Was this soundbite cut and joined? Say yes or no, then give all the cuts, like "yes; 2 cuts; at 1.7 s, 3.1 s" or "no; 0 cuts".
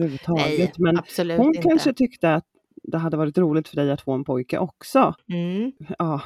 no; 0 cuts